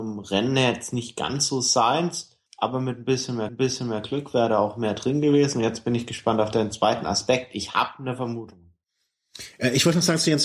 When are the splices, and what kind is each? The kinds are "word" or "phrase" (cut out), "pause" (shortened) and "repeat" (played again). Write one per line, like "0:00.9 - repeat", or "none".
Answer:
0:02.5 - pause
0:03.5 - repeat